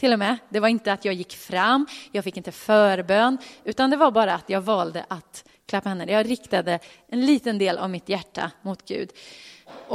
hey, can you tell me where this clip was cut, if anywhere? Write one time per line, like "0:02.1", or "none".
none